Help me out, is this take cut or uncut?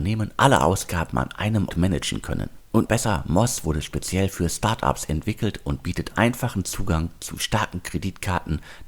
cut